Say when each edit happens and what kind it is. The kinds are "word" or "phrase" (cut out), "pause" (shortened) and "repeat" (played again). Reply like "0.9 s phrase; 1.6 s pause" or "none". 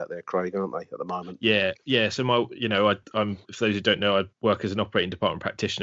3.4 s pause; 4.3 s pause